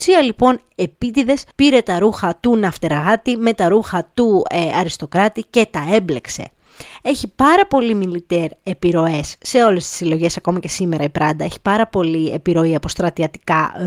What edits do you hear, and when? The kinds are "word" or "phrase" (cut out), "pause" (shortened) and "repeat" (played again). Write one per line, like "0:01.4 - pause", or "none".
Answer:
0:01.5 - pause